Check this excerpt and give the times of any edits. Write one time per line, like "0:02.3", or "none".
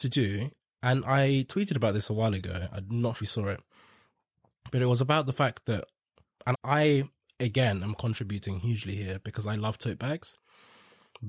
0:03.2
0:06.5